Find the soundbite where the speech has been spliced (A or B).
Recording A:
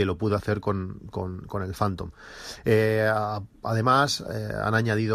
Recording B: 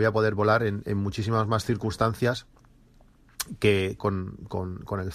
B